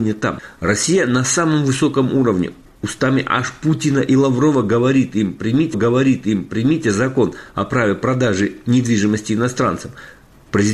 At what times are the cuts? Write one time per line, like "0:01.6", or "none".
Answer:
0:05.7